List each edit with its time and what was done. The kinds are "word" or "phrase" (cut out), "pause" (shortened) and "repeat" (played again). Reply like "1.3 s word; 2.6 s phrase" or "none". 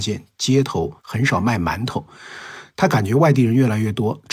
1.0 s pause